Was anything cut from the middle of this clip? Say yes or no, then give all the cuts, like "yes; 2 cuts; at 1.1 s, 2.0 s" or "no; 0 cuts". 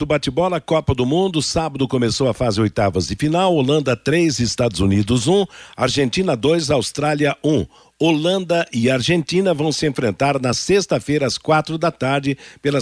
no; 0 cuts